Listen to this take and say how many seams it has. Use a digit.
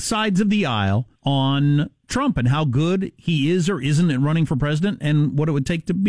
1